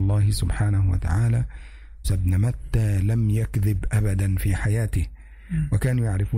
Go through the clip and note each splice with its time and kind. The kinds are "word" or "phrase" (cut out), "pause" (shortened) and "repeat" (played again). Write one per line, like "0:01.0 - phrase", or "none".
0:02.0 - phrase